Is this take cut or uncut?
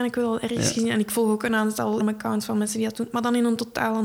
cut